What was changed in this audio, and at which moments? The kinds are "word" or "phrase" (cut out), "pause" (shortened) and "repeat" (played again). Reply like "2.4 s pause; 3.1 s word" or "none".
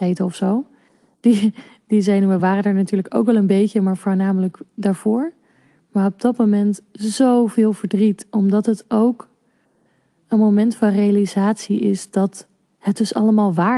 none